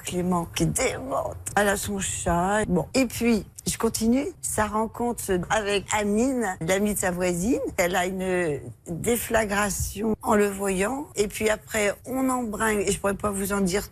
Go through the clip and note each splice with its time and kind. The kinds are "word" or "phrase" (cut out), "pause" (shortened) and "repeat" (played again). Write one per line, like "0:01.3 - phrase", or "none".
0:05.9 - word